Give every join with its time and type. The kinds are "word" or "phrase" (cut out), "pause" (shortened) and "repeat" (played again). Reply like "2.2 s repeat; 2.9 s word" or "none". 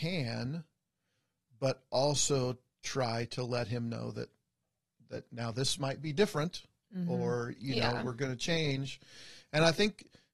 none

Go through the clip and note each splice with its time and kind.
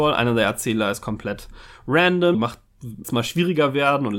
2.3 s phrase; 3.0 s word

